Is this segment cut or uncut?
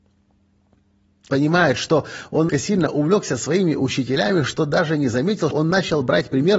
cut